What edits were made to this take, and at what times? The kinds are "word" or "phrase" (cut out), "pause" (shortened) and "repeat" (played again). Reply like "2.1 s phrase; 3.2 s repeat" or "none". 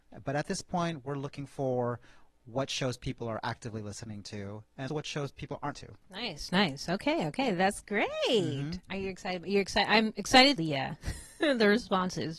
4.9 s word; 5.7 s phrase; 10.6 s phrase